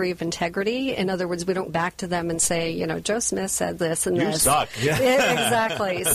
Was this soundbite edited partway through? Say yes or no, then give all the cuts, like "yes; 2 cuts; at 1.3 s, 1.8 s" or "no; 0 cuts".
yes; 2 cuts; at 1.7 s, 3.8 s